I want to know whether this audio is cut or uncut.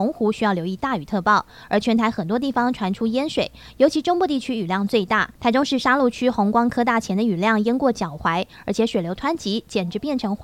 uncut